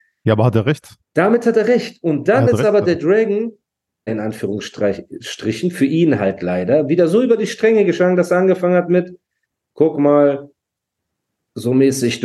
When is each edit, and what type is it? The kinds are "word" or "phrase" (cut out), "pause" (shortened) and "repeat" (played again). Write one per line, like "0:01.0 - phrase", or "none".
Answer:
0:01.0 - pause
0:04.1 - word